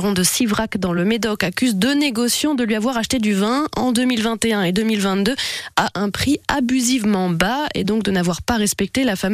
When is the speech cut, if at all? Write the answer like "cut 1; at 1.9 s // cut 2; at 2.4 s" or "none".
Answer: none